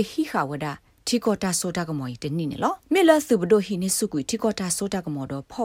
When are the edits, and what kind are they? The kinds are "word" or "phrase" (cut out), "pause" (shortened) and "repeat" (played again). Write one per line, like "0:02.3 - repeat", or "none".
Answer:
0:02.8 - pause